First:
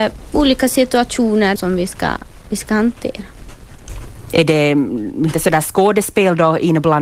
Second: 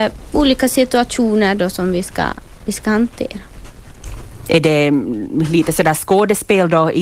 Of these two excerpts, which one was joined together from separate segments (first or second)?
first